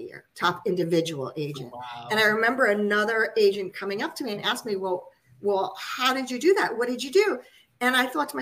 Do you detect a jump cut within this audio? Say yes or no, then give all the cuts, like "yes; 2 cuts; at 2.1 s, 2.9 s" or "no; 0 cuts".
no; 0 cuts